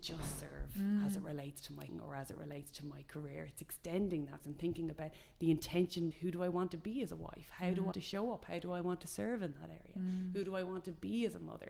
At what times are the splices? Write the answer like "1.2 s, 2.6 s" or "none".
1.9 s, 4.4 s, 6.1 s, 7.9 s